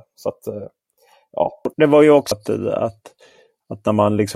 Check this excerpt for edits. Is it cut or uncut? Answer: cut